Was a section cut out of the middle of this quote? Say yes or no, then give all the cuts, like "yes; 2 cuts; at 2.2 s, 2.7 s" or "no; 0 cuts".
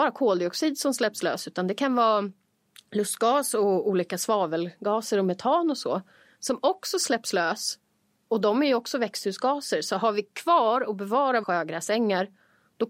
yes; 1 cut; at 11.4 s